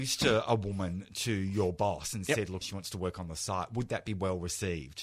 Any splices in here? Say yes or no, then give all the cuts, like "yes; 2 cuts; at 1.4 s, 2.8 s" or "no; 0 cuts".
yes; 1 cut; at 2.6 s